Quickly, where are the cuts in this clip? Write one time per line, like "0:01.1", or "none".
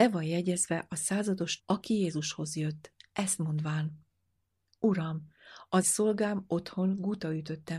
0:01.6
0:05.8